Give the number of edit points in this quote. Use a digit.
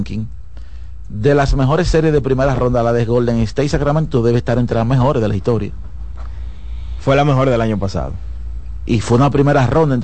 0